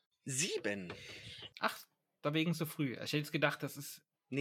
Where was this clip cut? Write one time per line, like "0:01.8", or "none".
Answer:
none